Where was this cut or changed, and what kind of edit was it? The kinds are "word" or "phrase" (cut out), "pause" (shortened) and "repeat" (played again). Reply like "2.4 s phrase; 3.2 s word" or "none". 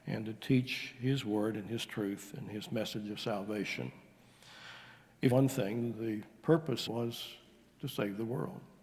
5.3 s phrase; 6.9 s phrase